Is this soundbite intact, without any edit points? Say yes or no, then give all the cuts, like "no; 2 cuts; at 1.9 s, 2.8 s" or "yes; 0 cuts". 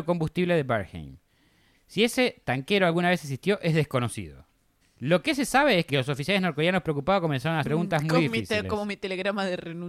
no; 3 cuts; at 4.8 s, 5.9 s, 7.6 s